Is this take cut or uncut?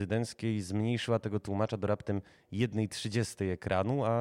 uncut